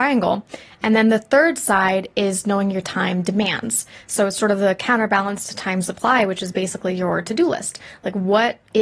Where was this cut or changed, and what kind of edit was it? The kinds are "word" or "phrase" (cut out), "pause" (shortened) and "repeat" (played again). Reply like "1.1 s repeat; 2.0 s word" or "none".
none